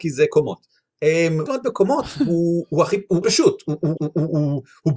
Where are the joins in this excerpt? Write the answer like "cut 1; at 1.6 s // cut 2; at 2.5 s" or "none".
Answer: cut 1; at 1.5 s // cut 2; at 3.2 s // cut 3; at 4.0 s